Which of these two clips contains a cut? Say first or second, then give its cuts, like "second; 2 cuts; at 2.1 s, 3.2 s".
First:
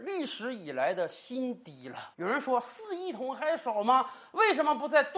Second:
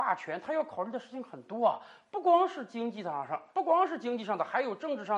first; 1 cut; at 2.1 s